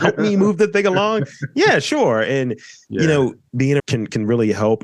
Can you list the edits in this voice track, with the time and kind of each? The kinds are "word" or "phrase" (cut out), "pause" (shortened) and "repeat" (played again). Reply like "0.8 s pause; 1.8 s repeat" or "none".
3.8 s phrase